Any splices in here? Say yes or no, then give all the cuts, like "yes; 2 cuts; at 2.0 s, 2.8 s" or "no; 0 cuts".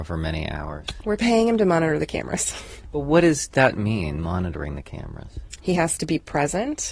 no; 0 cuts